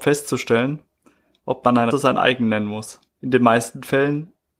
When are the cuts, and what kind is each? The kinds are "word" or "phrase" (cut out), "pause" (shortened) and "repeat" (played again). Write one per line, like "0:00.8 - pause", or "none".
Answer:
0:01.9 - word
0:03.1 - pause